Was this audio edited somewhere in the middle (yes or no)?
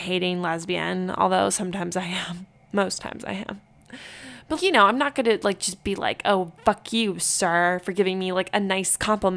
yes